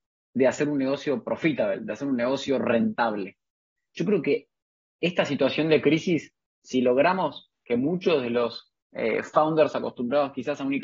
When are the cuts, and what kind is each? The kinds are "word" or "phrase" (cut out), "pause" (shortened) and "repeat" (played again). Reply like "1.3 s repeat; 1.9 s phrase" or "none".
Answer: 8.8 s pause